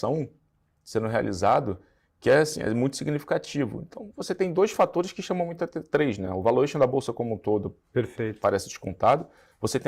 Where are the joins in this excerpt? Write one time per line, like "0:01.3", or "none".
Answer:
none